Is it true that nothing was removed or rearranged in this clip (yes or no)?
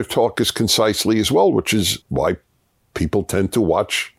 no